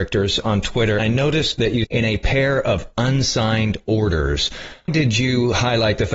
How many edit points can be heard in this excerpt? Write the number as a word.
three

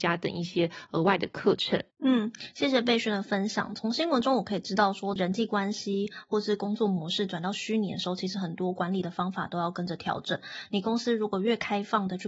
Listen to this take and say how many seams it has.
one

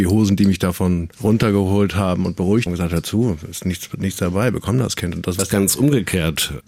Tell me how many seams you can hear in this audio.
three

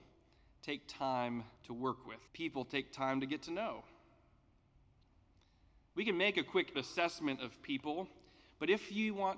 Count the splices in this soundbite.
three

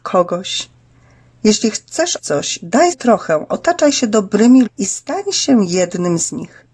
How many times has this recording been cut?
three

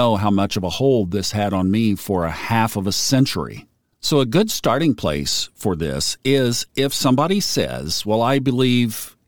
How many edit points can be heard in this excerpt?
zero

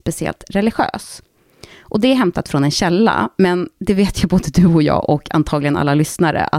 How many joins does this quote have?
zero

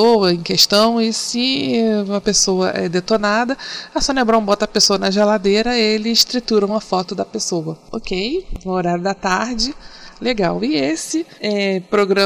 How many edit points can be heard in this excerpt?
zero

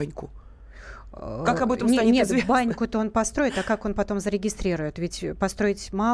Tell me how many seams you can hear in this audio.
zero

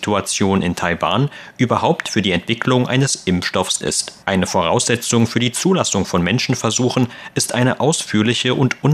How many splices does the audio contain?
two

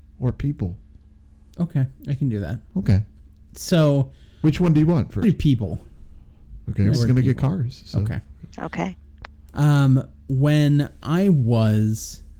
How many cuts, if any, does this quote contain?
four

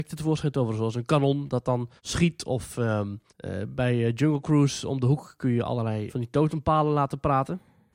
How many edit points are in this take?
three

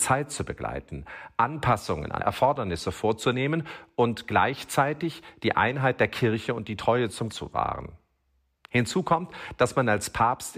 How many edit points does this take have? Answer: two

